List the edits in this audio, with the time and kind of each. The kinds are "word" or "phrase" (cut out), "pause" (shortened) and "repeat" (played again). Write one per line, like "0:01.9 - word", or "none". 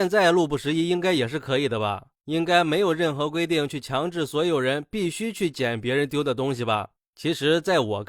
none